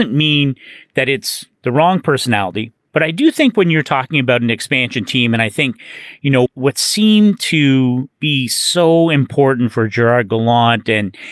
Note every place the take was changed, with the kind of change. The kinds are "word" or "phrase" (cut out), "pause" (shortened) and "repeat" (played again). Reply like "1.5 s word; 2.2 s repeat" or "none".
6.5 s word; 8.1 s pause